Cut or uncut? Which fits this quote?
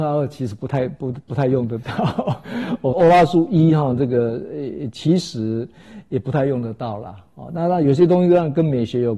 cut